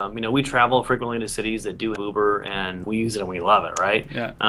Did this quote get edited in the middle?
yes; 2 cuts; at 2.0 s, 2.8 s

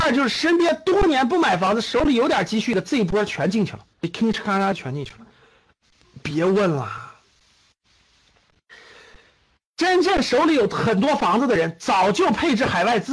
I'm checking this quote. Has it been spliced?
yes; 1 cut; at 3.9 s

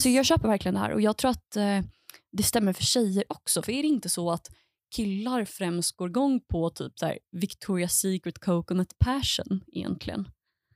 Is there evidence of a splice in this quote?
no; 0 cuts

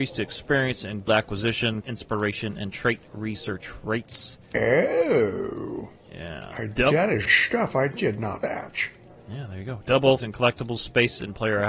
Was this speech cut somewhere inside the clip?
yes; 6 cuts; at 1.1 s, 1.8 s, 4.4 s, 7.3 s, 8.4 s, 10.2 s

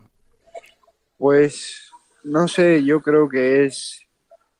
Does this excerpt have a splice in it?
no; 0 cuts

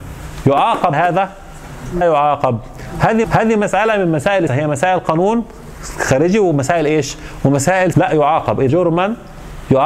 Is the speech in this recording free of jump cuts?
no; 6 cuts; at 0.9 s, 2.0 s, 3.2 s, 4.5 s, 7.9 s, 8.7 s

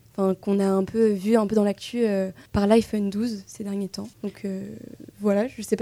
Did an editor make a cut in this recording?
yes; 2 cuts; at 2.5 s, 4.1 s

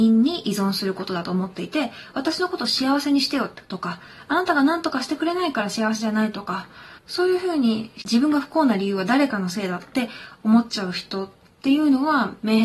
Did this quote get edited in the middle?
yes; 1 cut; at 7.0 s

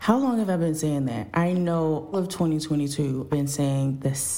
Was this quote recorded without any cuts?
no; 2 cuts; at 2.1 s, 3.3 s

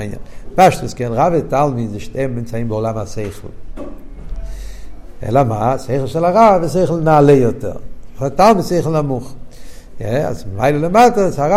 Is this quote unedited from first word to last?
yes; 0 cuts

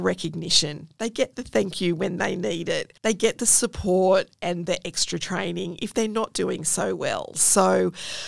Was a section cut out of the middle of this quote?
yes; 1 cut; at 3.0 s

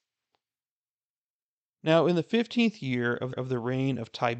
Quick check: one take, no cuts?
no; 1 cut; at 3.3 s

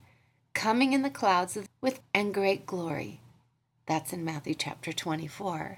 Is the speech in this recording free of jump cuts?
no; 2 cuts; at 1.7 s, 2.0 s

